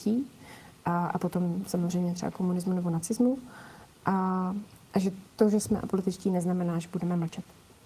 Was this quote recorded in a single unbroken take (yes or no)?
no